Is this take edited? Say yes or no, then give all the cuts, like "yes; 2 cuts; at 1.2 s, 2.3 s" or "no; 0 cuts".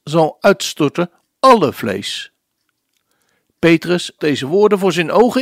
yes; 2 cuts; at 1.3 s, 4.2 s